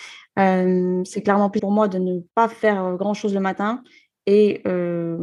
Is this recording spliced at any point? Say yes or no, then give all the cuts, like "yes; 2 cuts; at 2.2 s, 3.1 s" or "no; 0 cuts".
yes; 2 cuts; at 1.6 s, 2.3 s